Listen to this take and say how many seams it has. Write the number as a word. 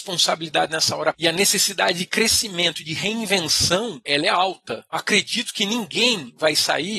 one